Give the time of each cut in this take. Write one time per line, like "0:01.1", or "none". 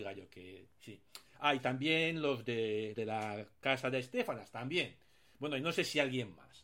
0:02.9